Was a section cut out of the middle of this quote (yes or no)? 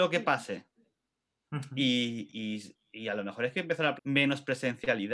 yes